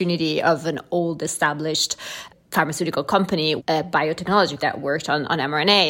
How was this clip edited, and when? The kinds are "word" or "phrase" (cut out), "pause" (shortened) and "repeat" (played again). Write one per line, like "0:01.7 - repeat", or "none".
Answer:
0:03.6 - word
0:04.6 - word